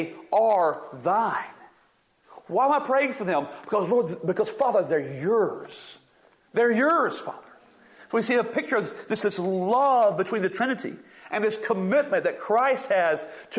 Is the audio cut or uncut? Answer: uncut